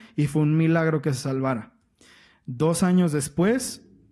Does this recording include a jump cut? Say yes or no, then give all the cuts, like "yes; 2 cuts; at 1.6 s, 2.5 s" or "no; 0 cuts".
no; 0 cuts